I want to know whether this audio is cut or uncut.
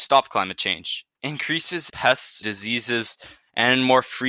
cut